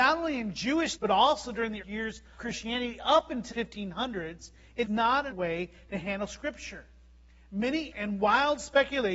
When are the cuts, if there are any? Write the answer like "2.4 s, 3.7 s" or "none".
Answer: 1.0 s, 1.8 s, 2.4 s, 3.5 s, 4.8 s, 5.3 s, 7.9 s